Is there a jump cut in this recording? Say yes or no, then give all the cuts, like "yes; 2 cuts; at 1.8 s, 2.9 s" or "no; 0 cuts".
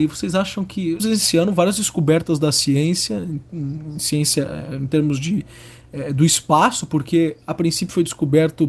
yes; 1 cut; at 1.0 s